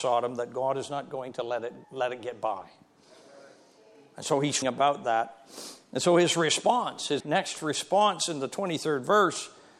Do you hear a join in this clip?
yes; 3 cuts; at 1.8 s, 4.6 s, 7.2 s

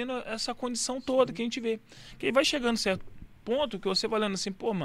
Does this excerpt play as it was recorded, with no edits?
yes; 0 cuts

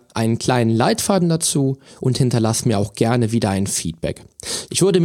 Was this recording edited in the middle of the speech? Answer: no; 0 cuts

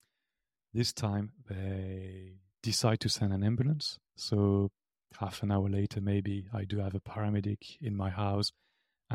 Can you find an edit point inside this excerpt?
yes; 1 cut; at 4.1 s

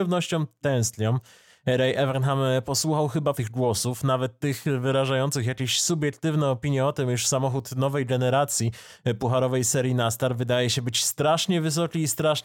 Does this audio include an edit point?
yes; 1 cut; at 3.3 s

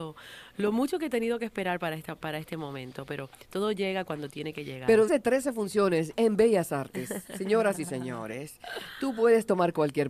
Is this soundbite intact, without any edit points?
no; 1 cut; at 5.1 s

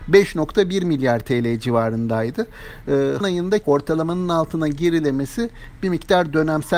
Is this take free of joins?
no; 2 cuts; at 3.2 s, 3.6 s

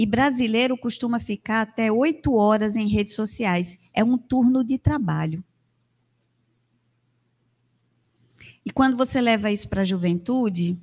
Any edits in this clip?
no; 0 cuts

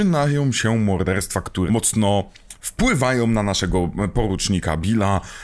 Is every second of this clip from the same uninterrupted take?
no; 1 cut; at 1.7 s

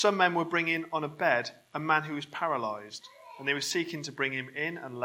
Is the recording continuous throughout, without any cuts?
yes; 0 cuts

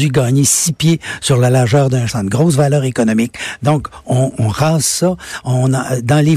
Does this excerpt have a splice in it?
yes; 1 cut; at 2.1 s

